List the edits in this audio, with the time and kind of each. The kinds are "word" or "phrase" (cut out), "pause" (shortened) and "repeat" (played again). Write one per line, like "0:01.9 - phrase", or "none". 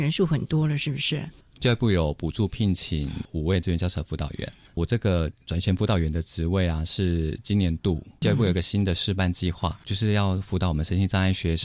none